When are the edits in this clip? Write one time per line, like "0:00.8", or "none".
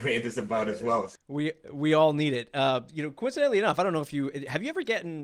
none